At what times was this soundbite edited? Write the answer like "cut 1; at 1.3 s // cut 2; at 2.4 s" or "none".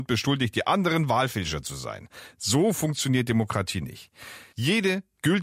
none